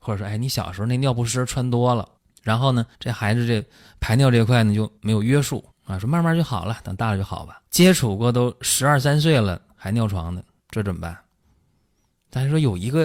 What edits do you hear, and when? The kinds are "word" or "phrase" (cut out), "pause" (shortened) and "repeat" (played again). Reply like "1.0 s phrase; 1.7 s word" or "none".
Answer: 2.2 s pause; 2.9 s pause; 5.0 s pause; 5.7 s pause; 7.7 s pause; 10.6 s pause